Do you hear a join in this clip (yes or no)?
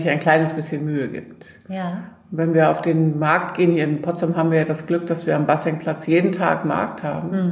no